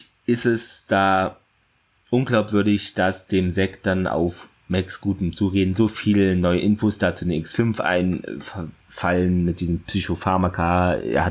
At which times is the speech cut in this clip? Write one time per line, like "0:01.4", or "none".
none

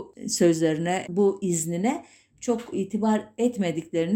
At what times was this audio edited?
0:01.1
0:02.7

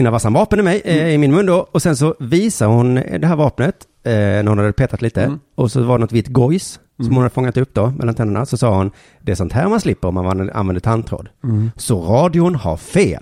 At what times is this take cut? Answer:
none

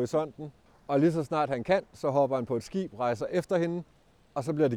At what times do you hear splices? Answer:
none

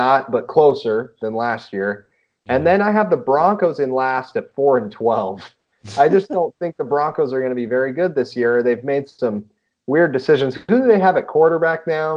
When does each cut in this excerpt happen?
none

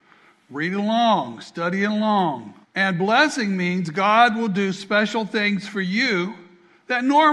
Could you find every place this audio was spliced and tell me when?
0:02.6

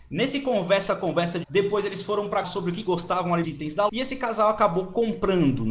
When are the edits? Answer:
0:01.4
0:02.4
0:02.8
0:03.4
0:03.9

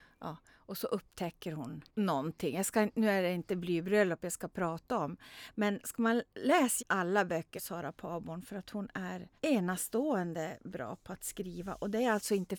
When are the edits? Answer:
0:01.9
0:06.8
0:07.6
0:09.4

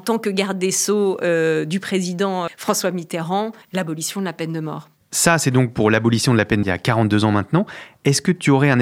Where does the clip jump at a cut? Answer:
0:02.5
0:03.6
0:06.6

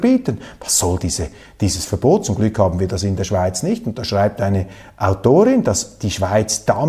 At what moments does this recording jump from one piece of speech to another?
none

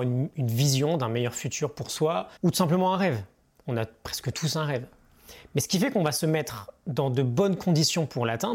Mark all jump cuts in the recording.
0:02.4

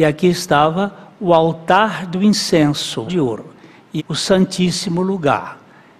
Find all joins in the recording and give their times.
0:03.1
0:04.0

